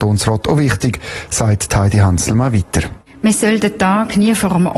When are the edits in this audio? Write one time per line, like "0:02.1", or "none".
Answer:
none